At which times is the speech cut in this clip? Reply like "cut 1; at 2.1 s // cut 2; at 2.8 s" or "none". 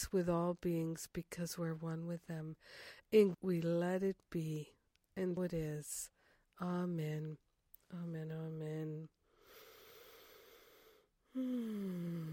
cut 1; at 3.3 s // cut 2; at 5.4 s

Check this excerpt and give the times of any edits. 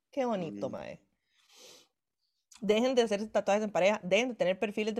none

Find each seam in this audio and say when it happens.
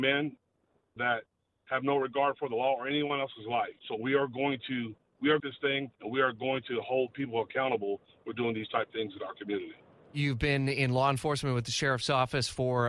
cut 1; at 1.0 s // cut 2; at 3.8 s // cut 3; at 5.4 s // cut 4; at 5.9 s

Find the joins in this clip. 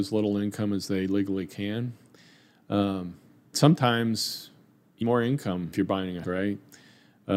cut 1; at 3.5 s // cut 2; at 5.0 s // cut 3; at 5.7 s // cut 4; at 6.2 s

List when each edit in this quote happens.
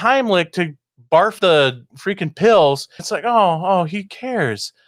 cut 1; at 1.4 s // cut 2; at 1.9 s // cut 3; at 3.0 s

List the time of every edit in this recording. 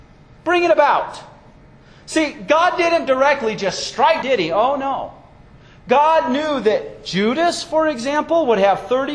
cut 1; at 4.2 s

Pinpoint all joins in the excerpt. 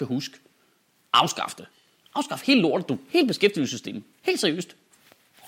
none

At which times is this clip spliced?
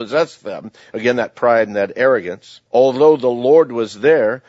cut 1; at 2.7 s

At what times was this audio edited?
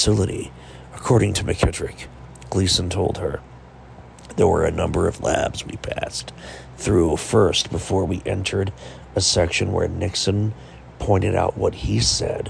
none

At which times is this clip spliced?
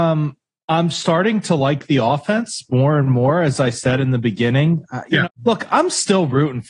cut 1; at 5.2 s

